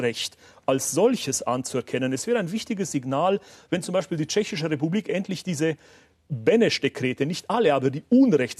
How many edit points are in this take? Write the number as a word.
one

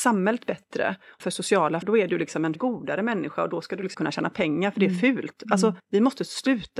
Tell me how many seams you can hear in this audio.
five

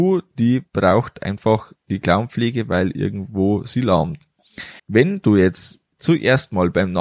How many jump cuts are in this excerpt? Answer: one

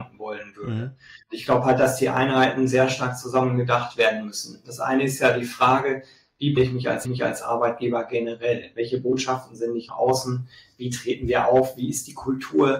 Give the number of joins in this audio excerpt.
four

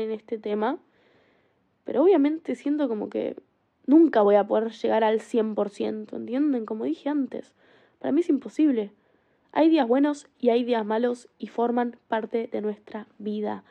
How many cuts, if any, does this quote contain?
zero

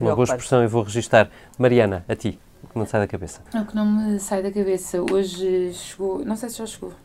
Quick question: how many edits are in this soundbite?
one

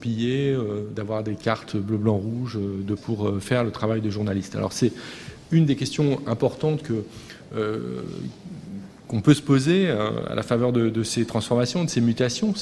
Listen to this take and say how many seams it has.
one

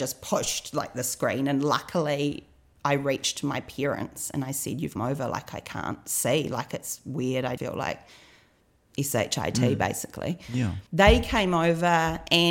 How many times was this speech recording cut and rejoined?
three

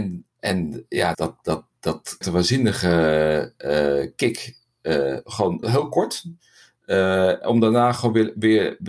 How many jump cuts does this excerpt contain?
three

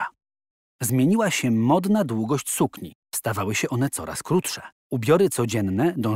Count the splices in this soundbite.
two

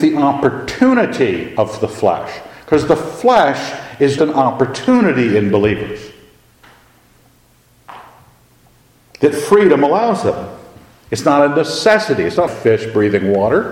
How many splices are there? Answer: two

